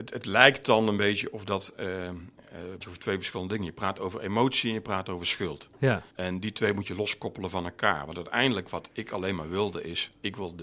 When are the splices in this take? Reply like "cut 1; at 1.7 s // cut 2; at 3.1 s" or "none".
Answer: cut 1; at 2.8 s // cut 2; at 6.1 s